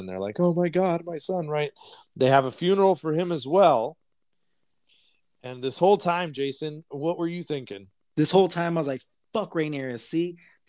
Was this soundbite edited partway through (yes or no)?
no